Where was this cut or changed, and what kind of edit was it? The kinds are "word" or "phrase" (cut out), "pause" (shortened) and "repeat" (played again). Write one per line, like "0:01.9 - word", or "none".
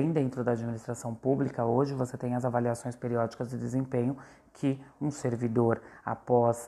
none